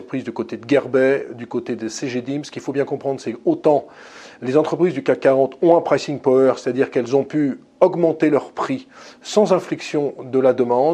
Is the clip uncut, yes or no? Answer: yes